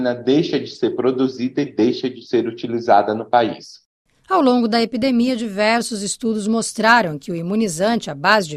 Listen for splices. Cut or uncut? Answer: uncut